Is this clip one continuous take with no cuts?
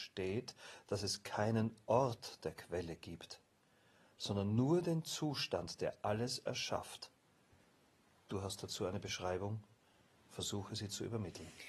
yes; 0 cuts

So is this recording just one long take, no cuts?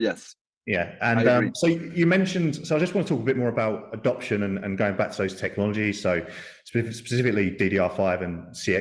yes; 0 cuts

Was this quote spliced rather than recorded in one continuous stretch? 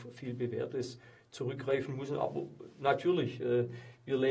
no; 0 cuts

